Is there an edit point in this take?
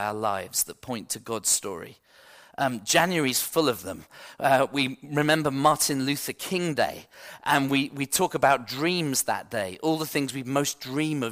no; 0 cuts

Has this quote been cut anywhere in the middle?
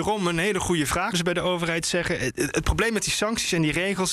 yes; 2 cuts; at 1.1 s, 2.3 s

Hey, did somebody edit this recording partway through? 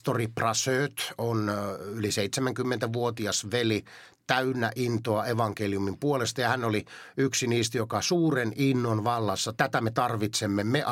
yes; 1 cut; at 9.5 s

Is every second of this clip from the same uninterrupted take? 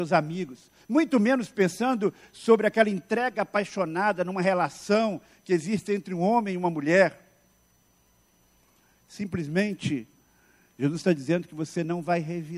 yes; 0 cuts

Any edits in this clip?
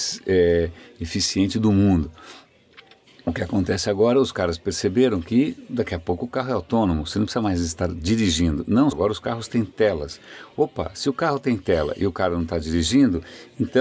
yes; 1 cut; at 8.9 s

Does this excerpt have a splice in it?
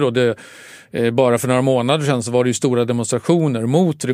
no; 0 cuts

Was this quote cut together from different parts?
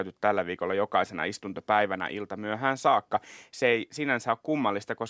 no; 0 cuts

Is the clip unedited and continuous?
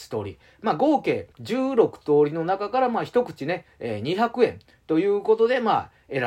no; 1 cut; at 1.3 s

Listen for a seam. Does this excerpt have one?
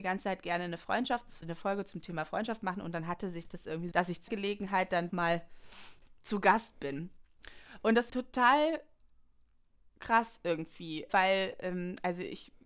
yes; 6 cuts; at 1.4 s, 3.9 s, 4.3 s, 5.1 s, 8.1 s, 11.1 s

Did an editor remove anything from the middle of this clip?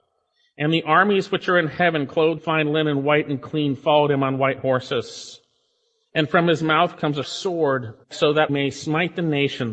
yes; 4 cuts; at 2.4 s, 7.2 s, 8.0 s, 8.5 s

